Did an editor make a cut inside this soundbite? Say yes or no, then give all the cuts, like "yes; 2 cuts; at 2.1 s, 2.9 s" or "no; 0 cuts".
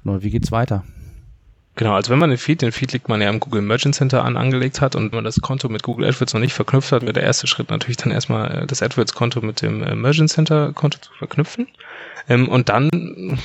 yes; 2 cuts; at 5.1 s, 8.7 s